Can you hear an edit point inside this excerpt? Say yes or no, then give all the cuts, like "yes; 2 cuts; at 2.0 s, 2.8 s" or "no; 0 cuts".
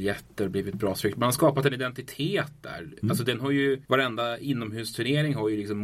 yes; 1 cut; at 3.8 s